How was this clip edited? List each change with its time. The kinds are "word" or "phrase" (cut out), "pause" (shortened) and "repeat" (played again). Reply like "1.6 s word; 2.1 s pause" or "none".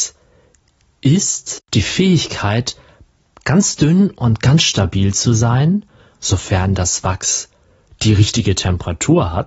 none